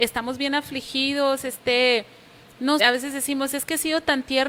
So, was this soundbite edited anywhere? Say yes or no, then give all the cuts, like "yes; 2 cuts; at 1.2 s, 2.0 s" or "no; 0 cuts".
yes; 1 cut; at 2.8 s